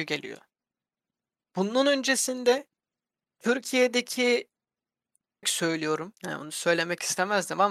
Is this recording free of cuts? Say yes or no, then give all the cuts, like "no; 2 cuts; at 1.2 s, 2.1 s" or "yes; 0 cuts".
no; 2 cuts; at 5.4 s, 6.2 s